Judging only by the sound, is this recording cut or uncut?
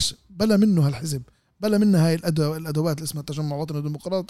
uncut